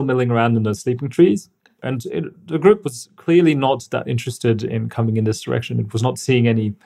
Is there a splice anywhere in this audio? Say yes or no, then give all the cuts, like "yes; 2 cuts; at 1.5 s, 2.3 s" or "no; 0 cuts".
no; 0 cuts